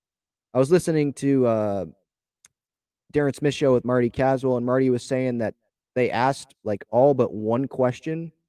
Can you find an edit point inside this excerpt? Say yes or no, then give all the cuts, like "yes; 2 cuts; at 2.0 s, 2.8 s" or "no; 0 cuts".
no; 0 cuts